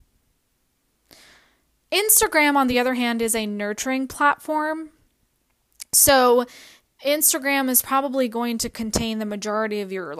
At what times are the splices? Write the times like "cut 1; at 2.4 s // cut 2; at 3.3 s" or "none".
none